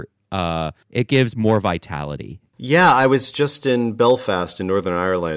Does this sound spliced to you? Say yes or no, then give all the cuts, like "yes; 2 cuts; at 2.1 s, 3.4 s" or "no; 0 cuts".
no; 0 cuts